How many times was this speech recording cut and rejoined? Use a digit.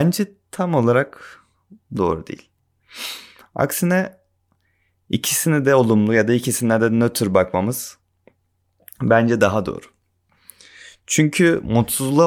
1